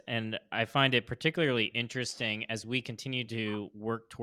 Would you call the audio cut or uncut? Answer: uncut